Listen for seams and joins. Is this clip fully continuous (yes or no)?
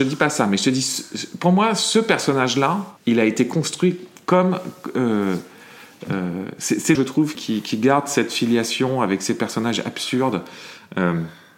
no